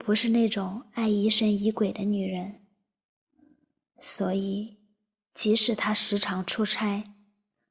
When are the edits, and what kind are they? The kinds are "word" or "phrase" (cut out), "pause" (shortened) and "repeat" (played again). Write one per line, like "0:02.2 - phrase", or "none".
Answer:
none

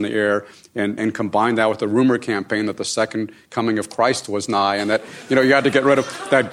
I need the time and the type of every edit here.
0:01.0 - word

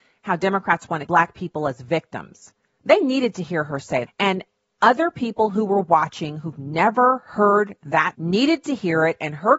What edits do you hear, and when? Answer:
0:01.1 - word
0:04.1 - word
0:08.1 - word

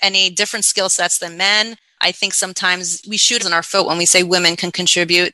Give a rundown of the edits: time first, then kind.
0:03.4 - word

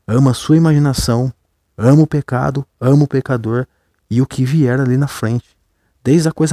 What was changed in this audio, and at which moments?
none

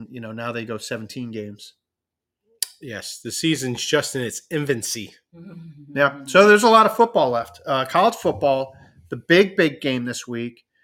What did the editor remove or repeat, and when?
none

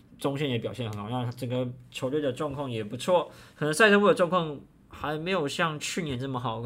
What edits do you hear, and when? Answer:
none

